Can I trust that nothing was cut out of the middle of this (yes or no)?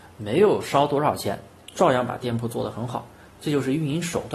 yes